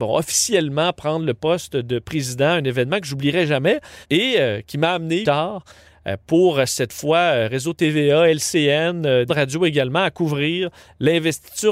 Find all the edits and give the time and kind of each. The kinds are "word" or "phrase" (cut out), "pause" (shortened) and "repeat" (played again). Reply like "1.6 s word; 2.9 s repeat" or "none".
4.0 s pause; 5.2 s phrase; 9.3 s word